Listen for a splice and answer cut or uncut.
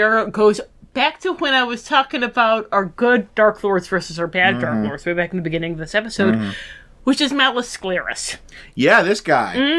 uncut